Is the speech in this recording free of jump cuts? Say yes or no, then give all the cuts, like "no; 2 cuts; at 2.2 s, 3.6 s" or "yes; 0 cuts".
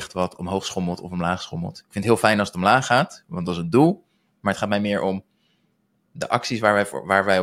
no; 1 cut; at 6.1 s